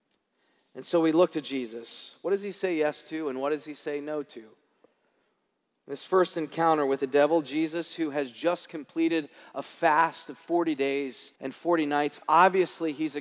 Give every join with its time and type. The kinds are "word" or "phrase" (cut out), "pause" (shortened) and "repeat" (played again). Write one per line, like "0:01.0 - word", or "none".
0:11.3 - pause